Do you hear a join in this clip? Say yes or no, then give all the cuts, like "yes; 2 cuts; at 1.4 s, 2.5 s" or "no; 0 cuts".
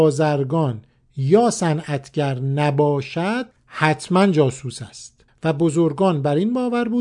yes; 2 cuts; at 3.5 s, 5.3 s